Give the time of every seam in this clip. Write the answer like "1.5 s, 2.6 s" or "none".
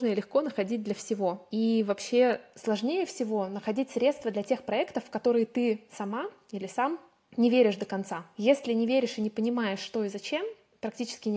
none